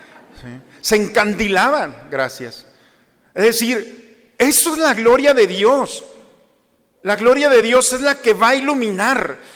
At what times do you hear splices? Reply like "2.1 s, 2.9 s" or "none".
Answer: none